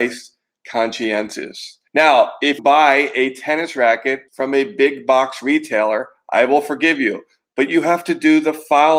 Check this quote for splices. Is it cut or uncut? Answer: cut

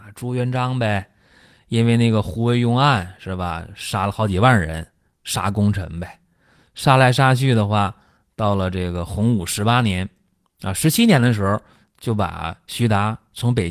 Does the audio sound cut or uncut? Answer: uncut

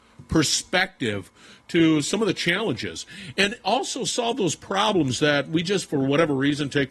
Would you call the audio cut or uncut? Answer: uncut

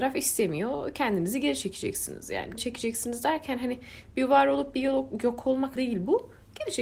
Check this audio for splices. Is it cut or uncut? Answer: cut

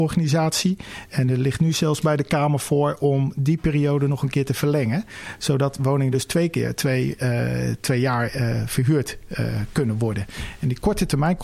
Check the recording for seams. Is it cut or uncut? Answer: uncut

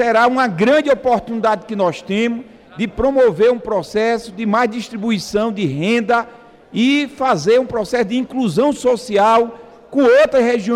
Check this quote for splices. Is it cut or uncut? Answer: uncut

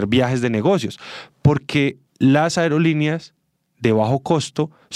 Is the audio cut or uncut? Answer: cut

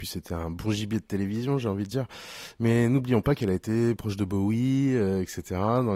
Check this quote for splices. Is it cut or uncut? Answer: cut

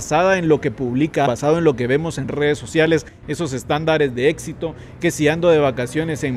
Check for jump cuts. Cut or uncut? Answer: cut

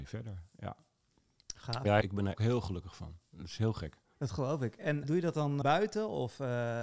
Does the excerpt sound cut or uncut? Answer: cut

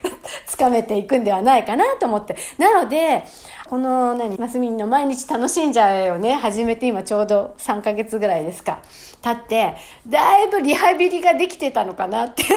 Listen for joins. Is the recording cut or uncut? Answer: cut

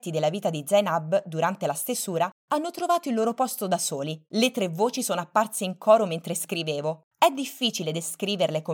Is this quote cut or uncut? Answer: cut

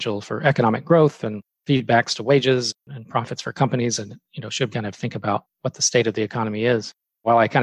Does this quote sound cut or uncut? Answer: cut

